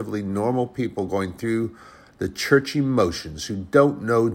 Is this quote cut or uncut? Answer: uncut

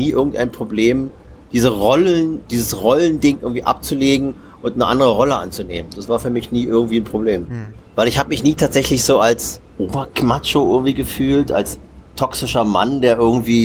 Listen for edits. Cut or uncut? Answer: cut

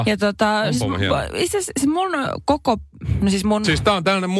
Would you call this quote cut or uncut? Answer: uncut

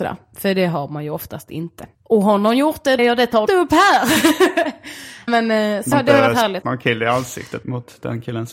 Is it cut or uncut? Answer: cut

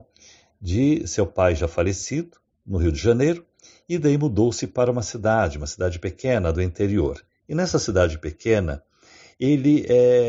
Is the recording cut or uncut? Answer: uncut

